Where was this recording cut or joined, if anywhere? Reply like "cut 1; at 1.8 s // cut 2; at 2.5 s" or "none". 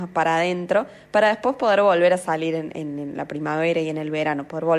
none